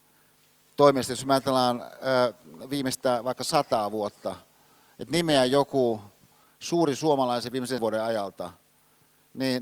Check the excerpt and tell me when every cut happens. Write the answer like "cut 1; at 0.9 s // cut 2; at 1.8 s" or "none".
cut 1; at 7.8 s